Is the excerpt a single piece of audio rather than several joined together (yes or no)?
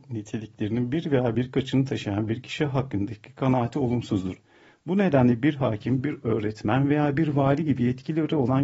yes